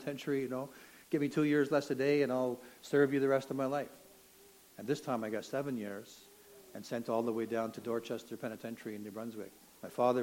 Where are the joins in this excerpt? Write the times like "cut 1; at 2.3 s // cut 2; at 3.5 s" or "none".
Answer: none